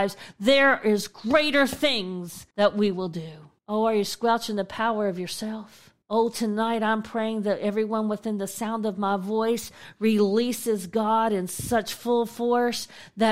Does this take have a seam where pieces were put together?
yes; 3 cuts; at 2.5 s, 3.6 s, 6.0 s

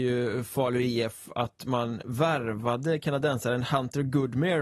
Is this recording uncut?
yes; 0 cuts

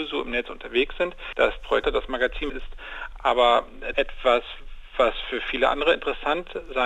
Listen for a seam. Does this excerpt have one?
yes; 3 cuts; at 1.8 s, 2.5 s, 3.9 s

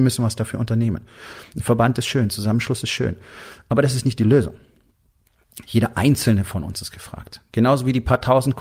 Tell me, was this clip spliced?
no; 0 cuts

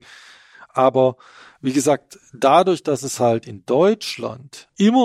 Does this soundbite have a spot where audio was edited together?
no; 0 cuts

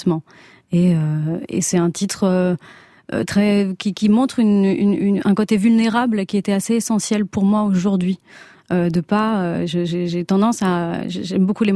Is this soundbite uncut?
yes; 0 cuts

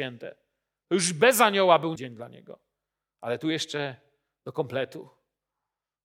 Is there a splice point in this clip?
yes; 1 cut; at 2.0 s

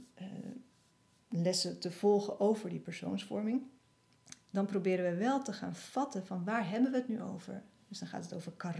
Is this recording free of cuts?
yes; 0 cuts

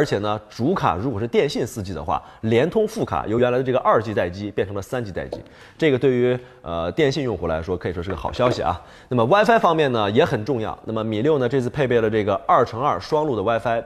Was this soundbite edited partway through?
no; 0 cuts

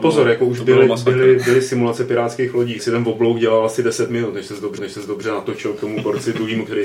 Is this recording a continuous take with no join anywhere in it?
no; 2 cuts; at 2.8 s, 4.8 s

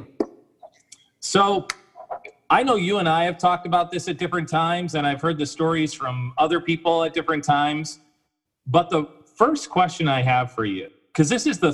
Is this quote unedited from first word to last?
yes; 0 cuts

